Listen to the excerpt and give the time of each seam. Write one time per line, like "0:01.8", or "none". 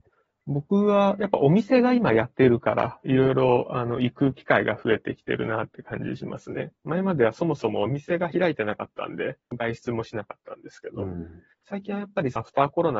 0:11.5